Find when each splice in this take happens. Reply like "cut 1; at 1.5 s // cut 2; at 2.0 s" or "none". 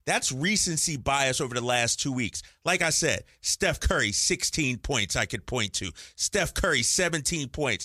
none